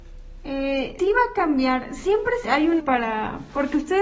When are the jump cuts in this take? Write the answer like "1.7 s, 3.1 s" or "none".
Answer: 1.0 s, 2.4 s, 2.8 s